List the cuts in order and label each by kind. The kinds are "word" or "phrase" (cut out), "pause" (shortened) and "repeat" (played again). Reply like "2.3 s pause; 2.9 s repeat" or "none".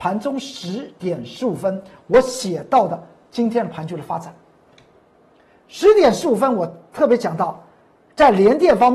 none